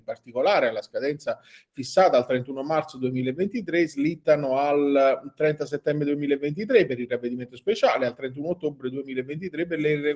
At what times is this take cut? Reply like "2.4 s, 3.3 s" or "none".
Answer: none

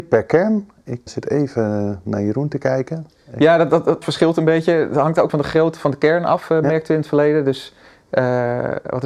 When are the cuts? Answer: 1.1 s, 4.0 s, 5.3 s

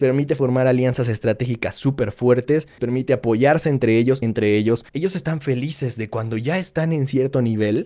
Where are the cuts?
2.8 s, 4.2 s, 4.9 s

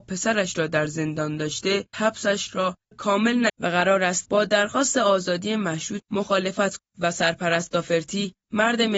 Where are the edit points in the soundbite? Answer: 1.9 s, 2.9 s, 3.5 s, 4.2 s, 6.0 s, 6.8 s

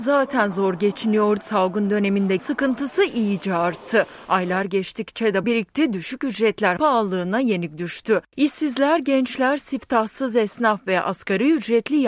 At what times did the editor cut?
1.4 s, 2.4 s, 5.4 s, 6.8 s

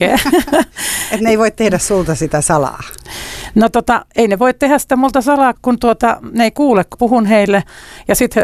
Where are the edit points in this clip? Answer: 5.5 s, 6.9 s

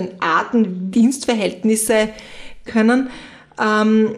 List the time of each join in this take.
0.9 s, 2.7 s

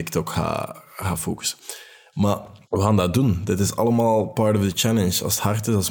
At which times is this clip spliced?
2.6 s

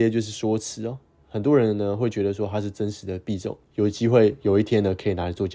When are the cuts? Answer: none

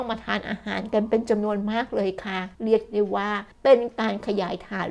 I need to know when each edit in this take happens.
2.5 s, 3.5 s

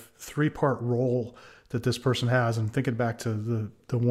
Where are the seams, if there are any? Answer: none

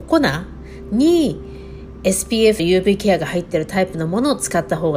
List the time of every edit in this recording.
2.6 s

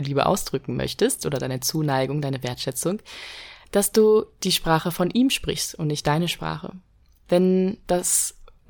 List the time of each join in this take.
none

